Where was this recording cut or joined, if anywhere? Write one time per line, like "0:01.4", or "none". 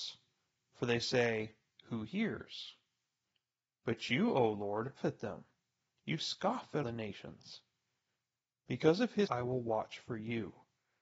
0:05.0
0:06.8
0:09.3